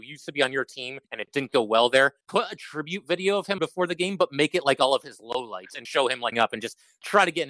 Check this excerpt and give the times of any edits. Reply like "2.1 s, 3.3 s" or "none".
1.0 s, 2.2 s, 3.6 s, 5.9 s, 6.3 s